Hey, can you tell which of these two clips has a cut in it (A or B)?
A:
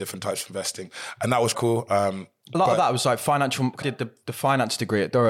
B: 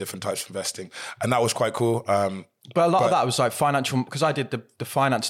A